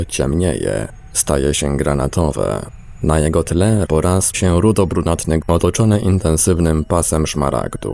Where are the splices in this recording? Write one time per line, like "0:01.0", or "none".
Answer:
0:03.8
0:04.3
0:05.4